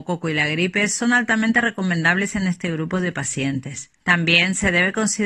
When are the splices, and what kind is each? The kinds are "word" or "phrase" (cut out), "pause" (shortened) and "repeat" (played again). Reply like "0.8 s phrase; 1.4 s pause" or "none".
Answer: 4.0 s pause